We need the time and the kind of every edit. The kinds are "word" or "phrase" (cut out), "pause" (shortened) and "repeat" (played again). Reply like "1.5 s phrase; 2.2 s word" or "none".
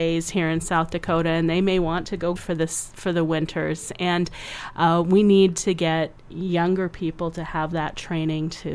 2.4 s phrase